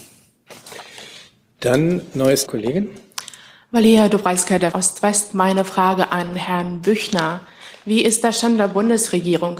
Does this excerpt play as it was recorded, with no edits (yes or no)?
no